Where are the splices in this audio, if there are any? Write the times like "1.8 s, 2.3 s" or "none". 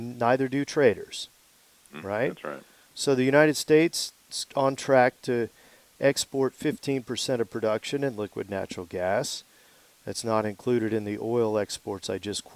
4.5 s